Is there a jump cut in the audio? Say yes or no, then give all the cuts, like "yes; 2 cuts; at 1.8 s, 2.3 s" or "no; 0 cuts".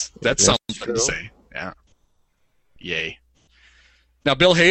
no; 0 cuts